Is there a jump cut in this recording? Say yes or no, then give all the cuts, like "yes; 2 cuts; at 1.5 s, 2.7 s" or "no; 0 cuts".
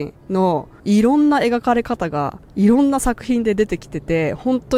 yes; 1 cut; at 2.5 s